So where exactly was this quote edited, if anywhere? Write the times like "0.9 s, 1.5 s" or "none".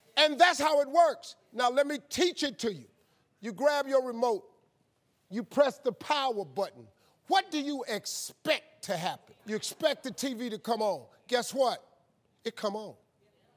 9.4 s